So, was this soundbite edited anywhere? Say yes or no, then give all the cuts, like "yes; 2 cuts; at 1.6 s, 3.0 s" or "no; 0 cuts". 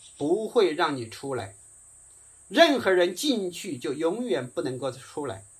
no; 0 cuts